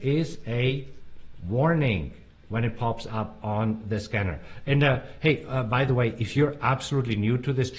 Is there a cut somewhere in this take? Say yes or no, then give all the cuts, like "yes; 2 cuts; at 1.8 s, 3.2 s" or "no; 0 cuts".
no; 0 cuts